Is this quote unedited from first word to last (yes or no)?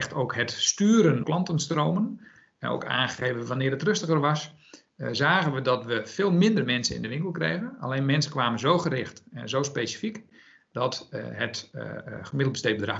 no